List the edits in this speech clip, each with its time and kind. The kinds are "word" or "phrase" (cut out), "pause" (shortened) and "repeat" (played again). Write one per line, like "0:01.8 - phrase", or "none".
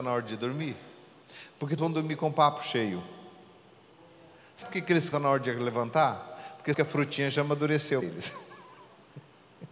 0:01.8 - word
0:04.6 - word
0:05.1 - word
0:06.7 - word
0:08.0 - word